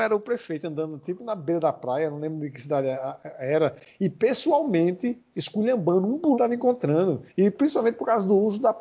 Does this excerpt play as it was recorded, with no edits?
no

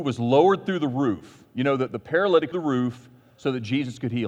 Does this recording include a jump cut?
yes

